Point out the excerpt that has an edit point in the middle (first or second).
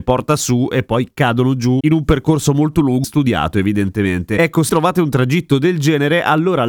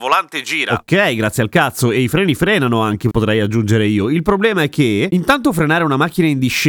first